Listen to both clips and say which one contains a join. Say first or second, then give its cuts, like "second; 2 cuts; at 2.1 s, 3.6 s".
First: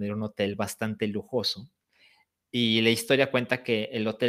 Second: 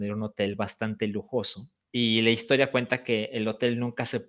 second; 1 cut; at 1.8 s